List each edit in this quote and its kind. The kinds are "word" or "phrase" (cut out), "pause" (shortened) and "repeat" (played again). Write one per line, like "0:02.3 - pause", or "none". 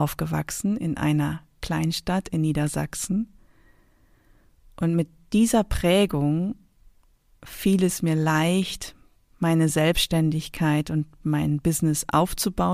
none